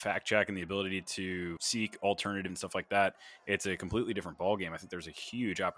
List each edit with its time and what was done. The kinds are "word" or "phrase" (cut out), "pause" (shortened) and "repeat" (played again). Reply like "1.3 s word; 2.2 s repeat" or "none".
1.6 s word; 2.5 s word